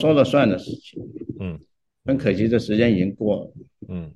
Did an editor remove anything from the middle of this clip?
no; 0 cuts

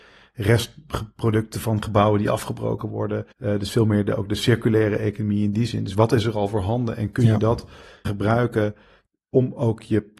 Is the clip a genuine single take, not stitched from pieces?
no; 3 cuts; at 3.3 s, 8.0 s, 9.2 s

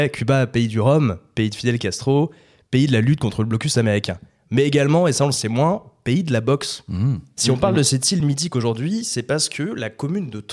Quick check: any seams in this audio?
no; 0 cuts

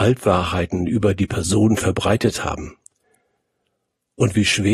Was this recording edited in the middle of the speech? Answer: no; 0 cuts

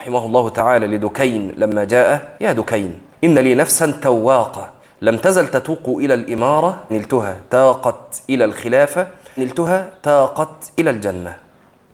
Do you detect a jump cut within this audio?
yes; 5 cuts; at 2.4 s, 3.1 s, 4.8 s, 6.9 s, 9.4 s

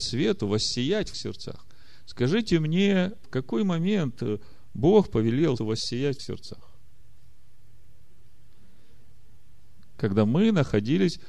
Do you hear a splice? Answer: yes; 3 cuts; at 1.1 s, 5.6 s, 6.2 s

